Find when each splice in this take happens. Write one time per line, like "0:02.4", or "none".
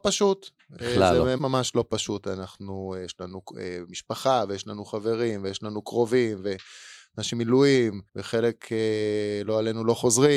0:01.4
0:07.3
0:08.1